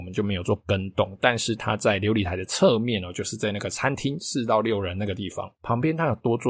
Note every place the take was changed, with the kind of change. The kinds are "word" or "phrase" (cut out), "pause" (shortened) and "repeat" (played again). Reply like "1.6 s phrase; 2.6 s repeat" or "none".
5.6 s pause